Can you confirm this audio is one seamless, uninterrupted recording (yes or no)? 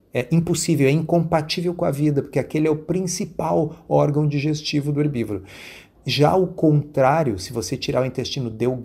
yes